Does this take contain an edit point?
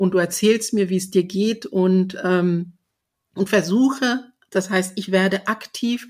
no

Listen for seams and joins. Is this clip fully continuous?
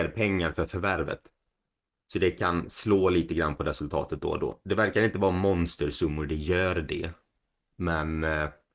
yes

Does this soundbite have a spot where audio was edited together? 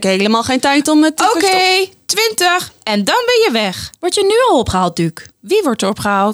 yes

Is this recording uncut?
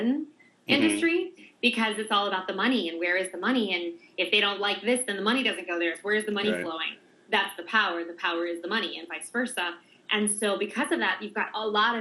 yes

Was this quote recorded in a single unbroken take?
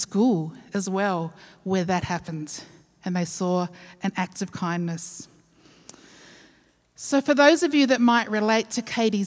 yes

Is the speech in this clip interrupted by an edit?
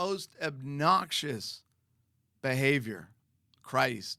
yes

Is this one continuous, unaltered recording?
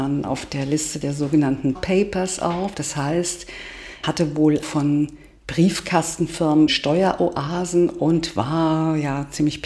no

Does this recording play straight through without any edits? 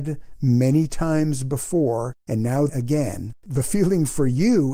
no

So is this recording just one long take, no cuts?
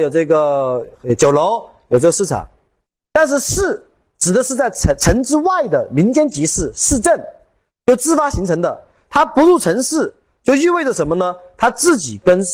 yes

